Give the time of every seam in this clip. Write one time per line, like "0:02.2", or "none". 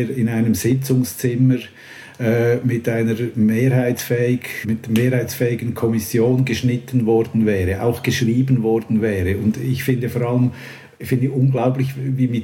0:04.6